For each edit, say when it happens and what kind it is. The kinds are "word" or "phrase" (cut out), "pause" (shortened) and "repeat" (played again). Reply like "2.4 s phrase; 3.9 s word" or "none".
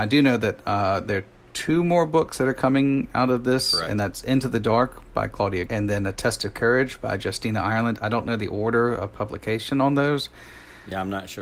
5.7 s word

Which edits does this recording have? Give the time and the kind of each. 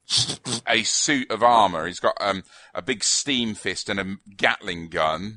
none

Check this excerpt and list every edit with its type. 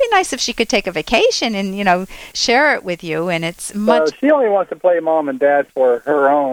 2.3 s word

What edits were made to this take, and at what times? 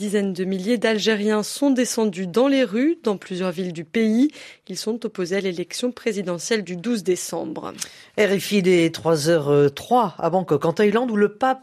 none

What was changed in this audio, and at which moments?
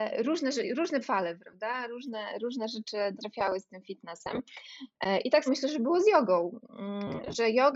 1.0 s word; 3.2 s word; 5.5 s word

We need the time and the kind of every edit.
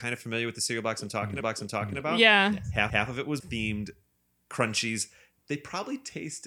1.4 s repeat; 2.9 s repeat; 3.4 s phrase

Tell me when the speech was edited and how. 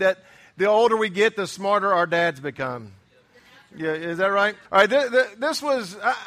4.6 s pause

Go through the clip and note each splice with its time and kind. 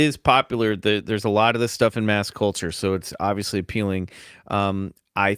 none

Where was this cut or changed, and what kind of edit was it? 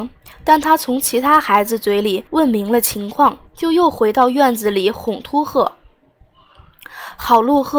2.3 s pause; 3.5 s pause

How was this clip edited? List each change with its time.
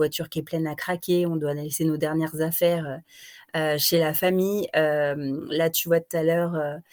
none

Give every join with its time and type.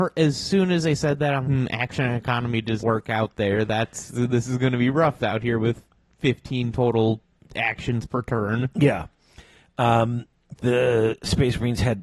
1.4 s word; 2.8 s word; 5.2 s phrase; 10.6 s word

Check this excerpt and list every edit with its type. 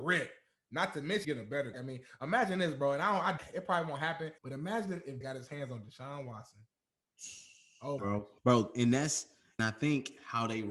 1.2 s phrase; 1.7 s word; 3.4 s word; 4.4 s pause; 5.2 s word; 8.0 s phrase; 8.4 s pause; 9.6 s word

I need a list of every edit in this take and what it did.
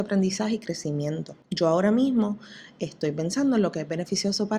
1.4 s pause

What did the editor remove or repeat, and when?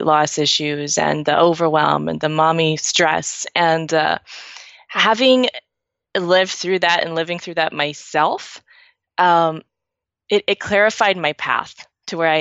none

